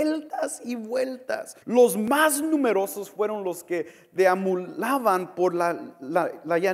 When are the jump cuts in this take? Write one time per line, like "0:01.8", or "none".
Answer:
0:01.6